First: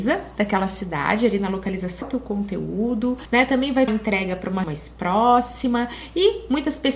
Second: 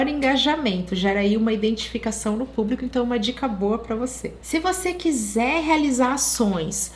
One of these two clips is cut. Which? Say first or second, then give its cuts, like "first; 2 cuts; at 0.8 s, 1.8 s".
first; 3 cuts; at 2.0 s, 3.9 s, 4.6 s